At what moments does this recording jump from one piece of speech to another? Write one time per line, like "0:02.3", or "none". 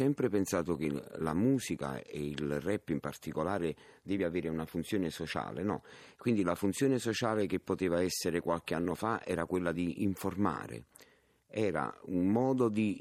none